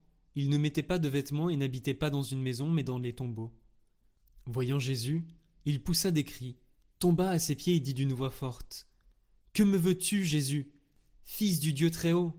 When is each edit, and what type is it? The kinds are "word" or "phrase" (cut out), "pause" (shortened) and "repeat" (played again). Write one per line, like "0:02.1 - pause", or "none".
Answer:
none